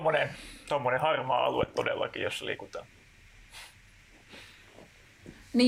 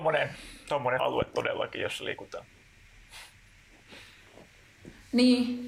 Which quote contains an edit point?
second; 1 cut; at 1.0 s

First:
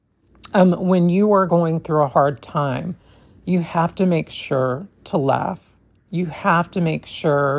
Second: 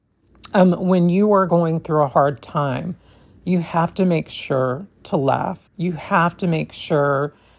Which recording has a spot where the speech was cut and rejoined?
second; 1 cut; at 5.7 s

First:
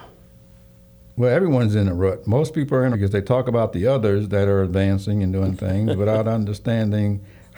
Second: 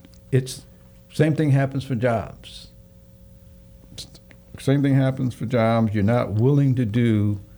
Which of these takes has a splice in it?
first; 1 cut; at 2.9 s

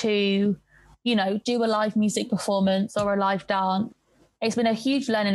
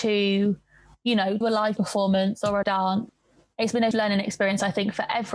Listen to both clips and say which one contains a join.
second; 4 cuts; at 1.4 s, 1.8 s, 2.6 s, 3.9 s

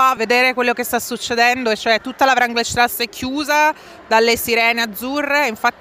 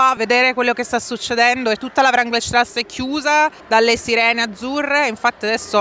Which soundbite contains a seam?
second; 2 cuts; at 1.8 s, 3.6 s

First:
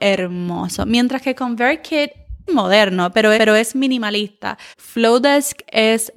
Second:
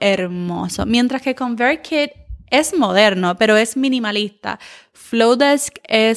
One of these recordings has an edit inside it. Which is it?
first; 3 cuts; at 2.5 s, 3.4 s, 4.7 s

